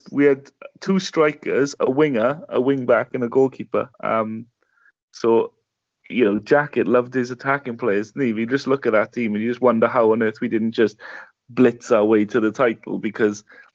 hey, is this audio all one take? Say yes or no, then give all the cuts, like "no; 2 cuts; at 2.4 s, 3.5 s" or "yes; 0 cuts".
no; 1 cut; at 3.9 s